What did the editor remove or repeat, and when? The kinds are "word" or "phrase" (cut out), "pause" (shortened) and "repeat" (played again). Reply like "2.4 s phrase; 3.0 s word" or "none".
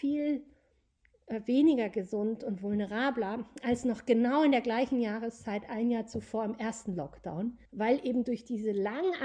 7.7 s pause